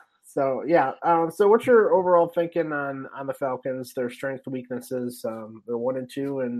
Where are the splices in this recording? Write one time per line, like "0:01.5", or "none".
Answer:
none